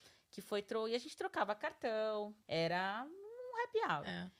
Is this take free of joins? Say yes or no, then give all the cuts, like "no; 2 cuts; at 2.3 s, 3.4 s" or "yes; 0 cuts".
no; 1 cut; at 2.4 s